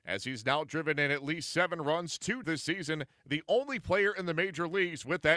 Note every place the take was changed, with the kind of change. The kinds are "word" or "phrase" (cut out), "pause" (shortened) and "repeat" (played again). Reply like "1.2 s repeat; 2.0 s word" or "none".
2.4 s word